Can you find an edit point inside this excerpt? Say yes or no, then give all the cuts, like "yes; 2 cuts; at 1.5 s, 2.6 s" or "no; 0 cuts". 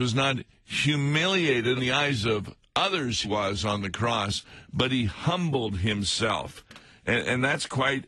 yes; 2 cuts; at 1.8 s, 3.2 s